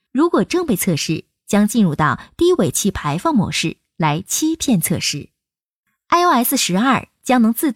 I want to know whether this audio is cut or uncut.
uncut